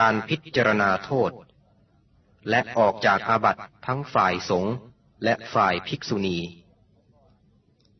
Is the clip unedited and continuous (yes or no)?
yes